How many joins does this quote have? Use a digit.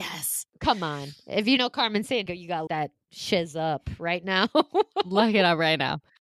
3